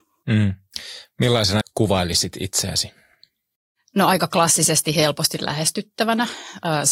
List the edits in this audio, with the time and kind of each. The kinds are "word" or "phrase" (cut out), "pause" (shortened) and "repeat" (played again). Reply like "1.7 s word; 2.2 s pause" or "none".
1.6 s word